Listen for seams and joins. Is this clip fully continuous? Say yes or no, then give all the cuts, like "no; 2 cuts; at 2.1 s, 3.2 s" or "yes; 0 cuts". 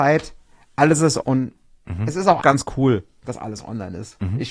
no; 2 cuts; at 1.2 s, 2.4 s